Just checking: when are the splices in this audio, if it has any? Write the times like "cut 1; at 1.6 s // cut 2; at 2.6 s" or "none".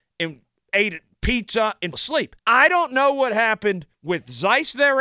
cut 1; at 1.9 s // cut 2; at 2.4 s // cut 3; at 3.9 s